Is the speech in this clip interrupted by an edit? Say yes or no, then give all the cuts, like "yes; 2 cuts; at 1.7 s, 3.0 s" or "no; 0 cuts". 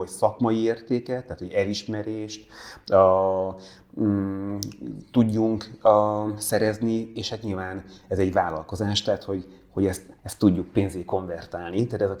yes; 1 cut; at 10.2 s